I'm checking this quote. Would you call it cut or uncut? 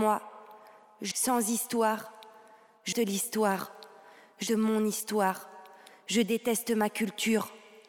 cut